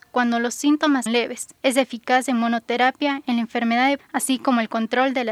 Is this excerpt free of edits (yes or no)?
no